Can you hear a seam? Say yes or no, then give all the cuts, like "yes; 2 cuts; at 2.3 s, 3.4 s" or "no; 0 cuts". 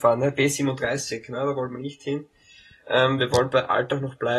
no; 0 cuts